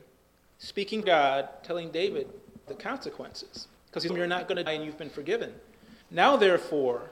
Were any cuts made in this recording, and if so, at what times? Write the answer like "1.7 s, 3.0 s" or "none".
1.0 s, 2.7 s, 3.8 s, 4.1 s, 4.7 s, 6.0 s